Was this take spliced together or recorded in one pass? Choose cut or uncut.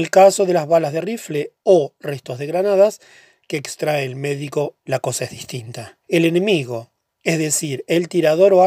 cut